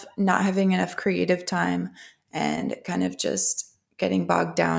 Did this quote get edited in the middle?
no; 0 cuts

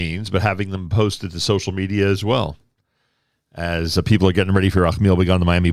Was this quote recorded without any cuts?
yes; 0 cuts

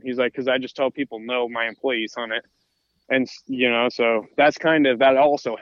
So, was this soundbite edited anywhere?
no; 0 cuts

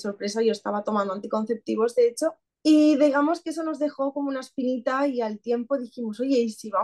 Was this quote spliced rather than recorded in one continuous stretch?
no; 0 cuts

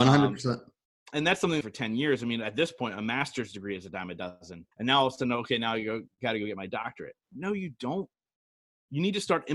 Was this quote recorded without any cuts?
no; 2 cuts; at 1.6 s, 4.7 s

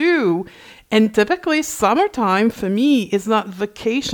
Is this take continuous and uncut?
yes; 0 cuts

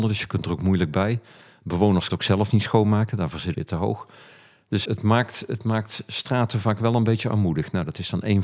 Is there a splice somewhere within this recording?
yes; 3 cuts; at 2.1 s, 3.5 s, 4.8 s

